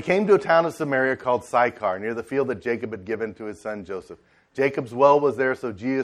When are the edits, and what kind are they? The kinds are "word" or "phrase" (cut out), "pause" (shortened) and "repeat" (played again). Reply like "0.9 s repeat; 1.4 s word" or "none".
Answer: none